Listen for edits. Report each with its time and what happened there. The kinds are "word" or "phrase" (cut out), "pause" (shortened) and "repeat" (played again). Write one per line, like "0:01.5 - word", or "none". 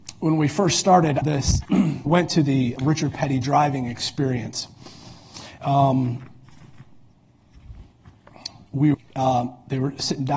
0:01.2 - word
0:01.6 - word
0:02.1 - word
0:02.8 - word
0:05.6 - word
0:08.9 - word

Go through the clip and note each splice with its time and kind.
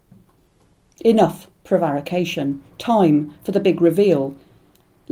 none

